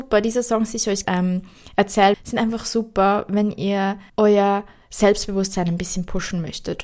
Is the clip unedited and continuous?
no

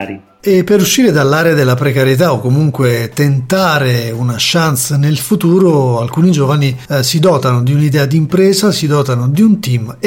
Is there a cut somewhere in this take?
no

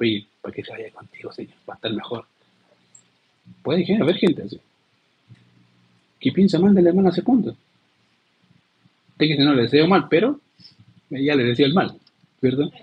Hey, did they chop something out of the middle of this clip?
yes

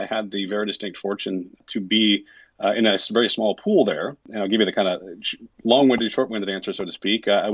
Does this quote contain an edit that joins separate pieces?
no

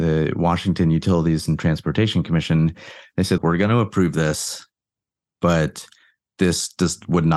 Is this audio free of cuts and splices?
no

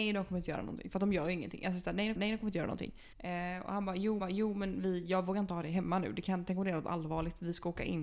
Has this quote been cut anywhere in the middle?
yes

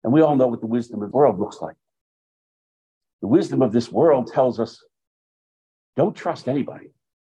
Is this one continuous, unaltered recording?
no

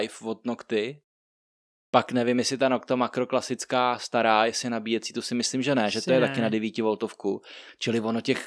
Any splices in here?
no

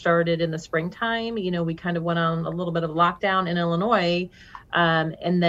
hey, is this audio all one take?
yes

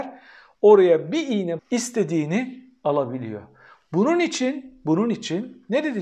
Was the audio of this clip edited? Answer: yes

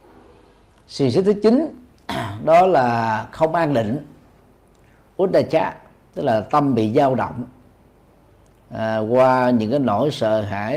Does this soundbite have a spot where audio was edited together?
no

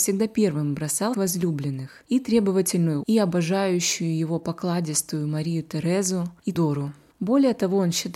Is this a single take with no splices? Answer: no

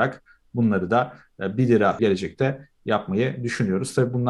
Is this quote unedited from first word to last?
no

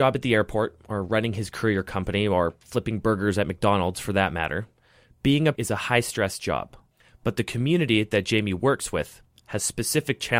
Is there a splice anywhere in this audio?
yes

